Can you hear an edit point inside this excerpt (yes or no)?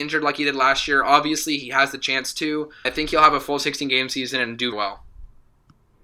yes